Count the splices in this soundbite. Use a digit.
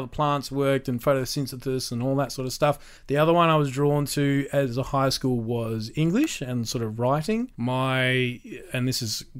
2